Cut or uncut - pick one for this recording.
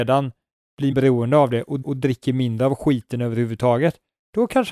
cut